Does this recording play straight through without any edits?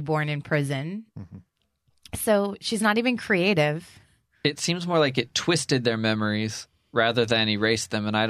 yes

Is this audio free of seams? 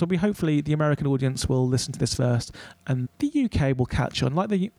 no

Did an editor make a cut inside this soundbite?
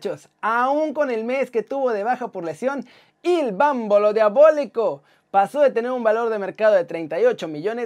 no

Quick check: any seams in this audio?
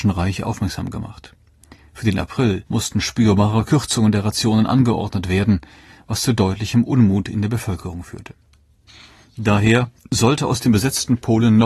yes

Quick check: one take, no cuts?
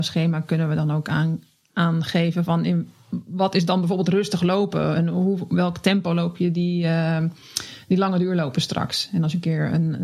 yes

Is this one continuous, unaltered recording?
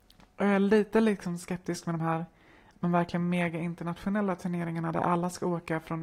yes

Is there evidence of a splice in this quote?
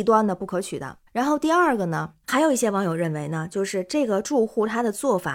yes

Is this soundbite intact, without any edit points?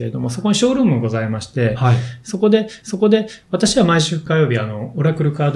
no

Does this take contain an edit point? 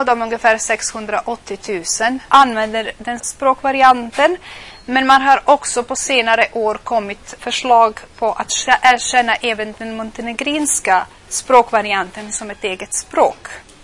yes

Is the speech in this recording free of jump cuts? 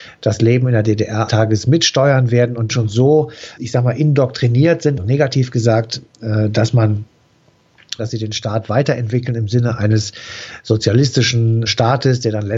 no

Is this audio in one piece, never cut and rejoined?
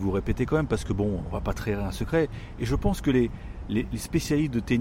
yes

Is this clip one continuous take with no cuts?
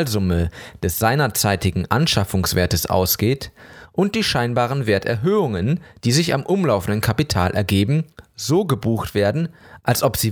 yes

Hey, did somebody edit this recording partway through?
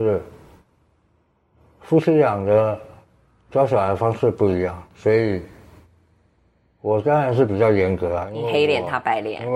yes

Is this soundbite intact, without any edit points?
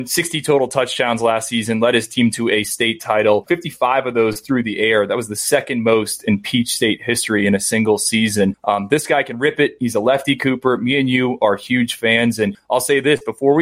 yes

